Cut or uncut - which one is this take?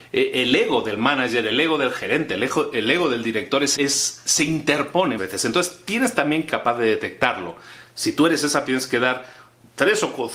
cut